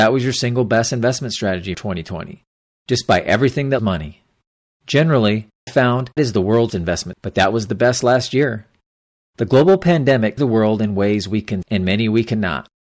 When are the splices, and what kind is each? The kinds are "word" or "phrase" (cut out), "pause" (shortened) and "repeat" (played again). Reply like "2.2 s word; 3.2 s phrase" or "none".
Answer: 1.7 s word; 3.8 s word; 5.7 s word; 6.2 s word; 6.7 s word; 7.1 s word; 10.4 s word; 11.6 s word